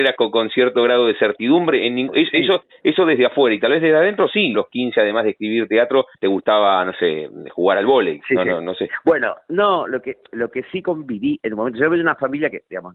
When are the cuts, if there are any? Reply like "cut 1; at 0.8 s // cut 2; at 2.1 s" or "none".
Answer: cut 1; at 4.5 s // cut 2; at 6.1 s